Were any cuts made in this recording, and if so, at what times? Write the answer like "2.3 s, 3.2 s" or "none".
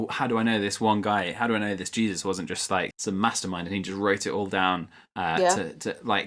2.9 s